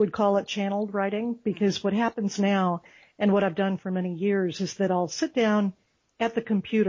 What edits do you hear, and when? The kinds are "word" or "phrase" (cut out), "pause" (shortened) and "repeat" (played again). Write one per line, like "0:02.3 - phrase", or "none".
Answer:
none